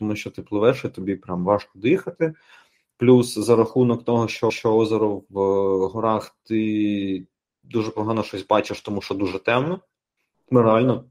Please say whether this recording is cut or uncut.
cut